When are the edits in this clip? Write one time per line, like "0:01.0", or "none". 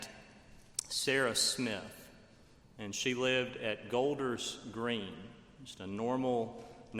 none

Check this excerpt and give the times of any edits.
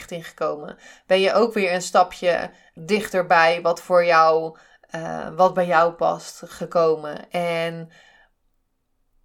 0:02.8

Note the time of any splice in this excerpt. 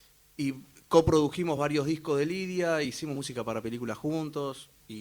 none

